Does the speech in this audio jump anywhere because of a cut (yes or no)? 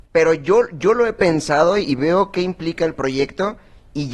no